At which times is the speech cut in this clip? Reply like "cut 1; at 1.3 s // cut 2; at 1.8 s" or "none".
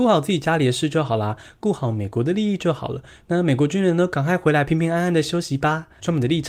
none

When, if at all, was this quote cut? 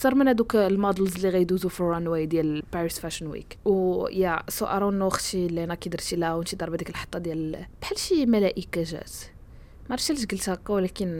none

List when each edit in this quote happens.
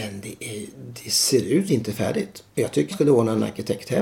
cut 1; at 1.7 s // cut 2; at 2.5 s // cut 3; at 2.9 s

